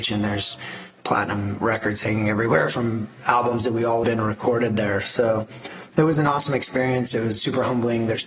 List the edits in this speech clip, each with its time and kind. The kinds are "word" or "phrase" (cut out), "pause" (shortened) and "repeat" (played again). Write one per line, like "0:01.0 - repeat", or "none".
0:04.0 - phrase